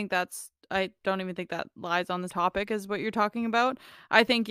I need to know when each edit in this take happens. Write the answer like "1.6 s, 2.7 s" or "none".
2.3 s